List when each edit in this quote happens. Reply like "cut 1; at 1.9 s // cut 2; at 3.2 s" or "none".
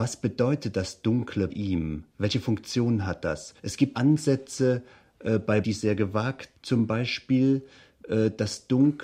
cut 1; at 1.5 s // cut 2; at 2.1 s // cut 3; at 3.6 s // cut 4; at 3.9 s // cut 5; at 5.6 s // cut 6; at 6.5 s